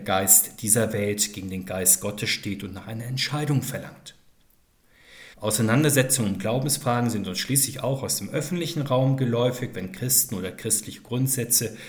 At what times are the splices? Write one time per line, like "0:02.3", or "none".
0:05.3